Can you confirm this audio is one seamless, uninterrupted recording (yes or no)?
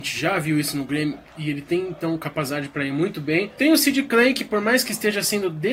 yes